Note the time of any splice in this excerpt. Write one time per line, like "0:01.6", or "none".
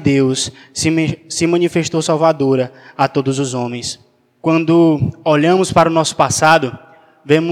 none